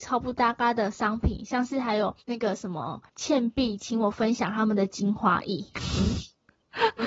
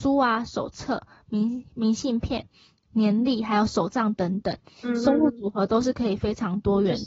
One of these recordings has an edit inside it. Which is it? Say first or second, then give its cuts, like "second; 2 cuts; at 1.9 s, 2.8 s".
first; 2 cuts; at 2.2 s, 3.1 s